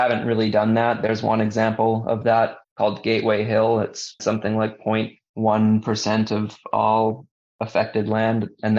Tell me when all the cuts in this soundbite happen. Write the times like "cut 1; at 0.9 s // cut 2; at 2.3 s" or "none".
cut 1; at 2.6 s // cut 2; at 4.2 s